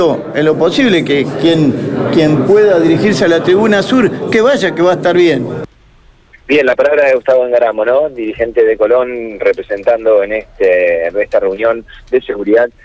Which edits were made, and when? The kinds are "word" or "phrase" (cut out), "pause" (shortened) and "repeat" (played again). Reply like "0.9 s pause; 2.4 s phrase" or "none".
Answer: none

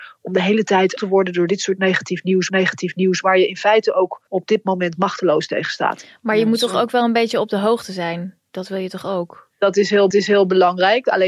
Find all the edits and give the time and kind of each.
1.0 s word; 2.5 s repeat; 4.3 s pause; 10.1 s repeat

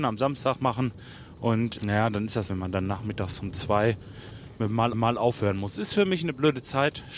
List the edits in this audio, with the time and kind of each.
1.8 s word; 2.5 s phrase; 4.9 s repeat

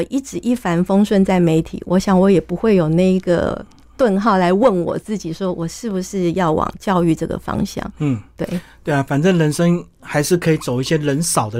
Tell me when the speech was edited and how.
none

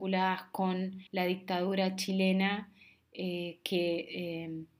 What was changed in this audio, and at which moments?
1.1 s pause

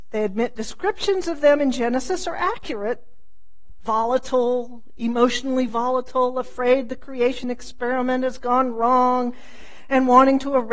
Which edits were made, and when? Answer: none

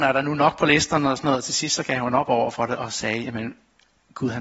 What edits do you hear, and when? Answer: none

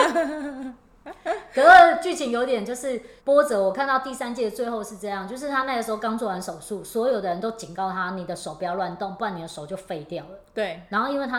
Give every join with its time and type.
3.2 s pause

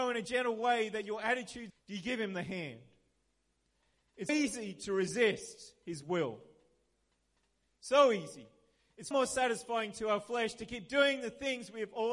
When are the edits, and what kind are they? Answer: 1.7 s word; 4.3 s word; 9.1 s word

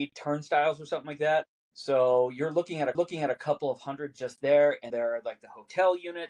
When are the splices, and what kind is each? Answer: 1.5 s pause; 2.9 s repeat; 4.9 s word

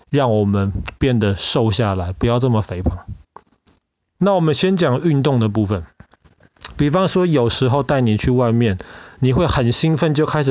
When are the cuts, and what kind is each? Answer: none

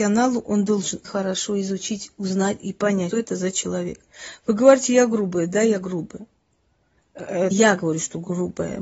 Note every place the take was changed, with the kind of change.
1.0 s word; 3.1 s word; 7.5 s word

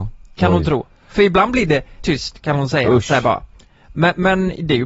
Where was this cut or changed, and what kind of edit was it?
2.0 s word

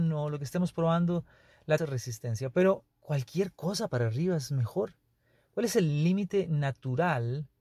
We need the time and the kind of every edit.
1.8 s phrase; 2.9 s pause

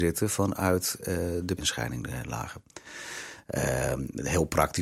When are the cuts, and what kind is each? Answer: 1.6 s phrase

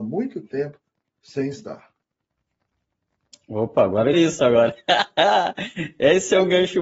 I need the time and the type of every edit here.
4.1 s phrase

